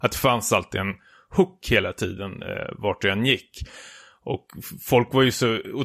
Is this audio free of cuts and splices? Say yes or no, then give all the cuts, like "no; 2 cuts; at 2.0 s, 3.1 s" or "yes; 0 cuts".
yes; 0 cuts